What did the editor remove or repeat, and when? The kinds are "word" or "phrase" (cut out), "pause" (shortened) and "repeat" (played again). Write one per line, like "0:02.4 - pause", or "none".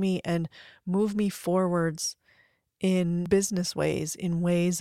none